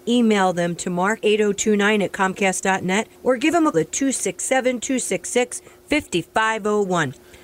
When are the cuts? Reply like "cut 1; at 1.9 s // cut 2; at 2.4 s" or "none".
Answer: cut 1; at 1.2 s // cut 2; at 3.1 s // cut 3; at 3.7 s